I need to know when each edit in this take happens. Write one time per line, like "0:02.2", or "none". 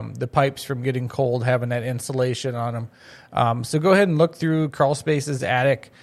none

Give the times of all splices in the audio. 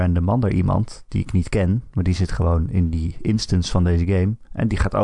none

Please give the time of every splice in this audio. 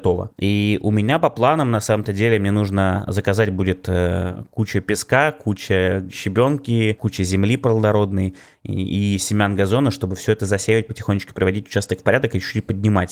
none

